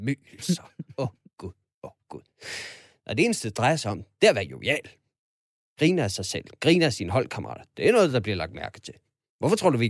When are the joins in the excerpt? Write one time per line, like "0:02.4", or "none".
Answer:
none